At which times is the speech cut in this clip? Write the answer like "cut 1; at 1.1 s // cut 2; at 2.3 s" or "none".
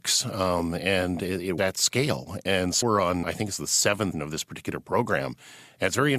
cut 1; at 1.6 s // cut 2; at 2.8 s // cut 3; at 3.2 s // cut 4; at 4.1 s